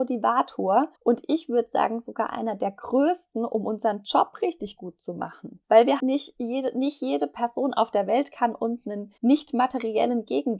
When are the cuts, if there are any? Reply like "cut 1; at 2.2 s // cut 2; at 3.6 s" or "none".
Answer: cut 1; at 1.0 s // cut 2; at 5.6 s // cut 3; at 6.0 s // cut 4; at 9.2 s